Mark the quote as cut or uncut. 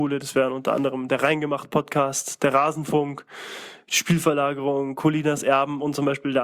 uncut